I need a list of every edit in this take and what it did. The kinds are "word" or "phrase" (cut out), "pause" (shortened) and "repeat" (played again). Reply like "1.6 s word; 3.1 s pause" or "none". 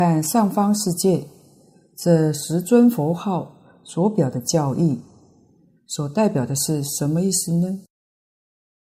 none